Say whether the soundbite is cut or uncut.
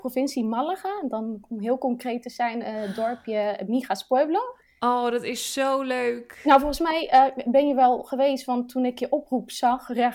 uncut